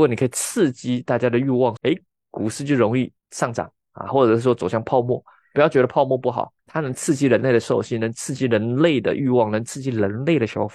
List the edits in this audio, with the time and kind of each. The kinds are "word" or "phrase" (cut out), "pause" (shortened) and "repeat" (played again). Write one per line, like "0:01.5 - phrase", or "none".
0:01.8 - phrase
0:03.2 - pause
0:06.6 - pause